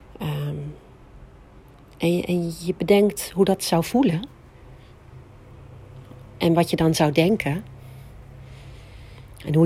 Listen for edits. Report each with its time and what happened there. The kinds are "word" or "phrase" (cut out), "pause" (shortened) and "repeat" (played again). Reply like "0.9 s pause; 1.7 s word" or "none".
none